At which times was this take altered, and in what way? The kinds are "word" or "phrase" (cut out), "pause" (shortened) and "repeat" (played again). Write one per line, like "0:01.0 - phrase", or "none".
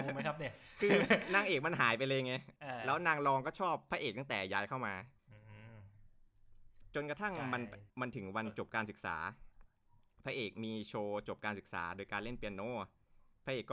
none